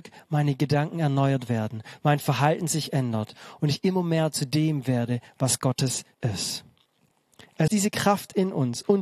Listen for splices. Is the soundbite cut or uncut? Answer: cut